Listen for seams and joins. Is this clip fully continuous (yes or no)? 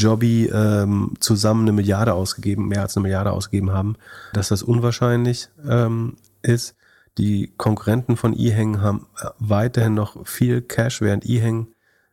no